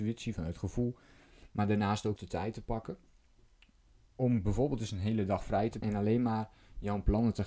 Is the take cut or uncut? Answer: cut